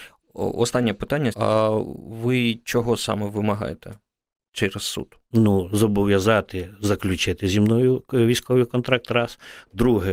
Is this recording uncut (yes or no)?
no